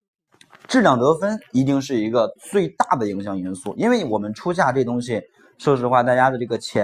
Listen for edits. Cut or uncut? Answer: uncut